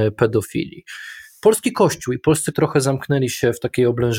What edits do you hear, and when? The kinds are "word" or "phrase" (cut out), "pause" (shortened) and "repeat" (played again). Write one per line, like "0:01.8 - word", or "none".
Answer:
0:02.5 - word